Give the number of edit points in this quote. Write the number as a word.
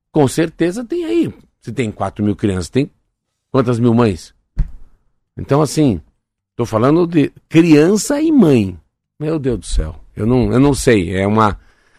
zero